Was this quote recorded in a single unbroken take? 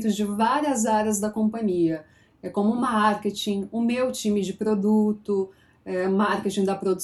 yes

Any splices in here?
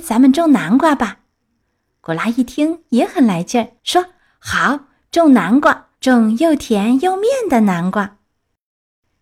yes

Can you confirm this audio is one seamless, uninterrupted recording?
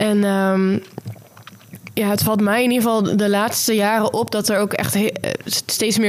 yes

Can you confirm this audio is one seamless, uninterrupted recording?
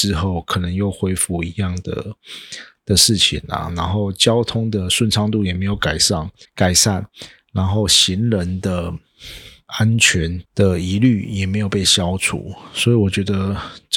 no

